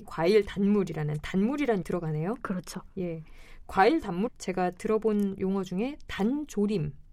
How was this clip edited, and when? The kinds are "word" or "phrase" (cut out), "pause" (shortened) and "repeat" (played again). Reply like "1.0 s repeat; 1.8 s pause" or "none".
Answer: 1.8 s word; 4.3 s phrase